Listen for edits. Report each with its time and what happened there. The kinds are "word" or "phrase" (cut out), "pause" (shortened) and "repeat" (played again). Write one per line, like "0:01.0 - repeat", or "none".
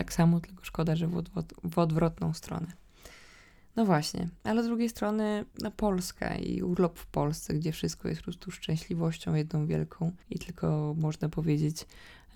0:05.5 - pause
0:10.2 - pause